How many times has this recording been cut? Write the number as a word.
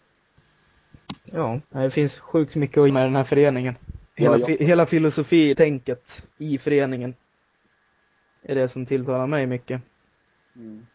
six